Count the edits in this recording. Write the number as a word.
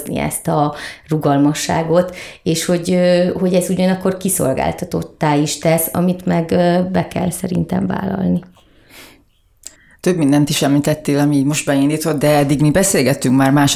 one